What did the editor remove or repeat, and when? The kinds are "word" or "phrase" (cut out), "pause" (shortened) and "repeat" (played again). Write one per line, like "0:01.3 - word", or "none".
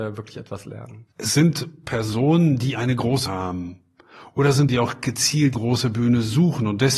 0:01.1 - pause
0:03.3 - word
0:04.7 - phrase
0:05.5 - word